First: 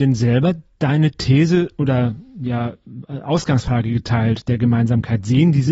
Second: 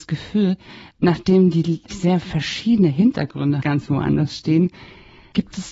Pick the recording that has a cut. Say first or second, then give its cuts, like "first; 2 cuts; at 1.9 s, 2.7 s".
second; 2 cuts; at 1.9 s, 3.6 s